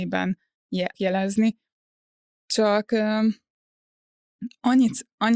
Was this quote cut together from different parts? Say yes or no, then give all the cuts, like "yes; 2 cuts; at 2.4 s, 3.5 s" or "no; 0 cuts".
yes; 1 cut; at 0.9 s